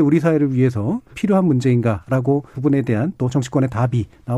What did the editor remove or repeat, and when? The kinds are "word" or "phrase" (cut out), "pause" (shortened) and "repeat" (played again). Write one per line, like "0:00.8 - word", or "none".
0:01.1 - word
0:02.5 - word